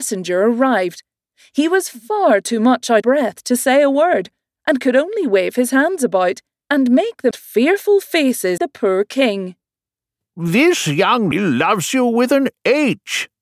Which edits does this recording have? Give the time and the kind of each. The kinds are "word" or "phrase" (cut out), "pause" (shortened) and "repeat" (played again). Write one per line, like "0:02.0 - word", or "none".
0:03.0 - word
0:07.3 - word
0:08.6 - word
0:11.3 - word